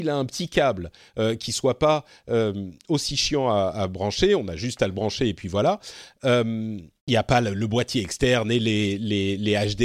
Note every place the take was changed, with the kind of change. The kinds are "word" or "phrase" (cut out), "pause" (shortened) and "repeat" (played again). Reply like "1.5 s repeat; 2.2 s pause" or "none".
7.0 s pause